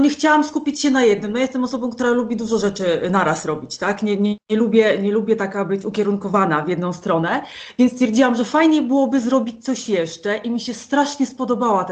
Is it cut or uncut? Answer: uncut